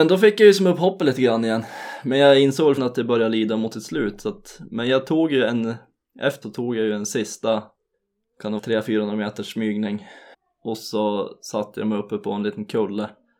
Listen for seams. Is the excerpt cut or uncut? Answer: cut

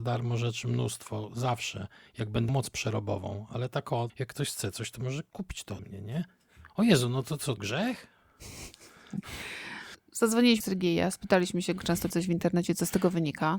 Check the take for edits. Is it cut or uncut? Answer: cut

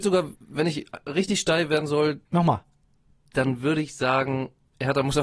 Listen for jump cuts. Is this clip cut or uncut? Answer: cut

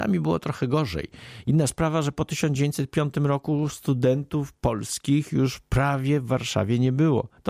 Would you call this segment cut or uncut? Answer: uncut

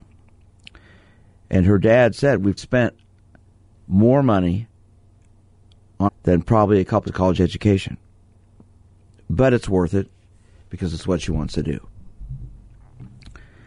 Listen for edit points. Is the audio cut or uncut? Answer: cut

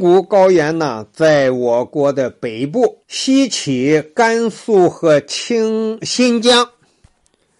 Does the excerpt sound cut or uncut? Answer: cut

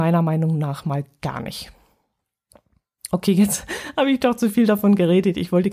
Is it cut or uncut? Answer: uncut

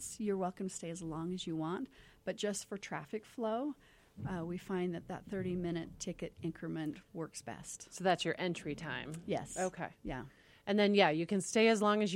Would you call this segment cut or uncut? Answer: uncut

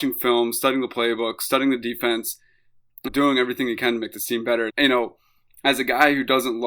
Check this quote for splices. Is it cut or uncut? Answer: cut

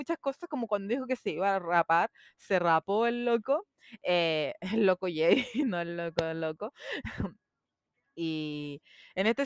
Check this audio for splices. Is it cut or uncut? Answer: uncut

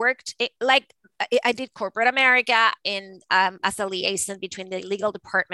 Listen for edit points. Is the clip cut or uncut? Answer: uncut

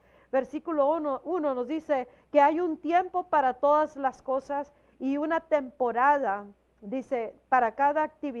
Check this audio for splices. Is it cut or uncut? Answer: uncut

